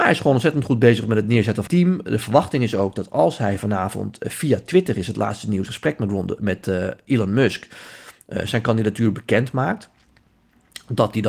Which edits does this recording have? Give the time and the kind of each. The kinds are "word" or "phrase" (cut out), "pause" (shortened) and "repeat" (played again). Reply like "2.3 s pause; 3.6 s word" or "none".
1.7 s word; 5.7 s word